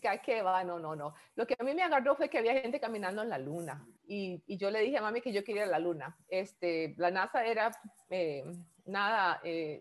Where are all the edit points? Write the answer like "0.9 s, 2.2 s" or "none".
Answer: 4.0 s